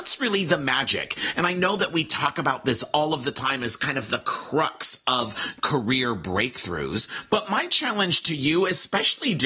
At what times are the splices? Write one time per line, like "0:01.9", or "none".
none